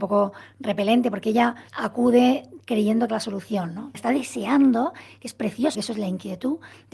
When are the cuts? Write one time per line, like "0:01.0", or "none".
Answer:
0:01.7
0:03.1
0:03.9
0:05.7